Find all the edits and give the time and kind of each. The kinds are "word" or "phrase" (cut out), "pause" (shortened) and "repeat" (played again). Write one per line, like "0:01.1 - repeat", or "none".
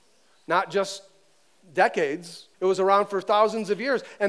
0:02.5 - pause

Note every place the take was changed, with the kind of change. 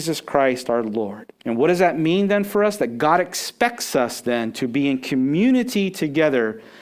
0:01.4 - pause

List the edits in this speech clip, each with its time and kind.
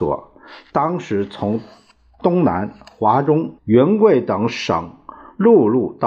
0:03.6 - pause

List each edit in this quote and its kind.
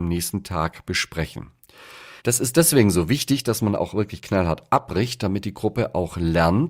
0:02.2 - pause

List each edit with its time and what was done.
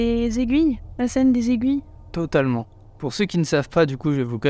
none

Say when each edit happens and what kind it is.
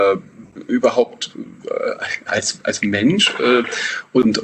0:02.3 - word
0:02.6 - word

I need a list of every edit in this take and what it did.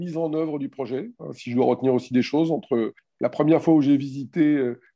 none

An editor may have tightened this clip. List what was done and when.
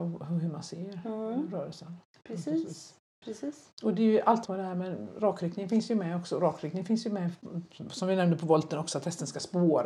0:04.4 - phrase

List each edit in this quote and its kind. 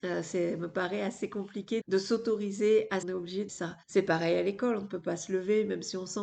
0:01.8 - word
0:03.0 - phrase
0:03.5 - word
0:03.8 - pause

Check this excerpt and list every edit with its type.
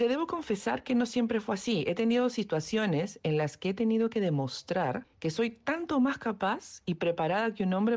none

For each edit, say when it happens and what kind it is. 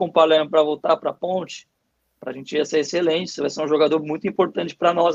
none

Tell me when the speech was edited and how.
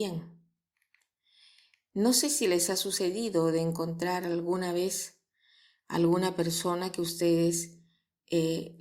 none

